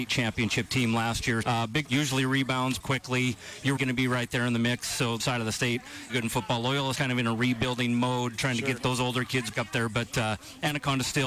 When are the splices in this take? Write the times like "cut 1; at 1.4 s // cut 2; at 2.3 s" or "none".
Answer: cut 1; at 1.4 s // cut 2; at 1.8 s // cut 3; at 2.8 s // cut 4; at 3.8 s // cut 5; at 5.2 s // cut 6; at 6.1 s // cut 7; at 6.9 s // cut 8; at 8.8 s // cut 9; at 9.5 s